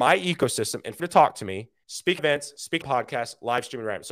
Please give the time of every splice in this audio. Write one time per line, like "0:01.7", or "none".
0:01.0
0:01.8
0:02.2
0:02.8